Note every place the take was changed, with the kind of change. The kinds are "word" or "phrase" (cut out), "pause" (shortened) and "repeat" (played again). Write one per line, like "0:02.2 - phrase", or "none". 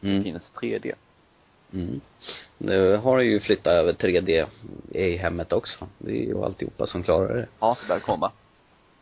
0:06.3 - word